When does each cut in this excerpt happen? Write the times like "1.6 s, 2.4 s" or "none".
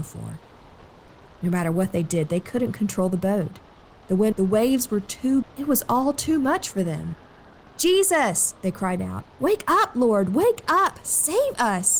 4.3 s, 5.4 s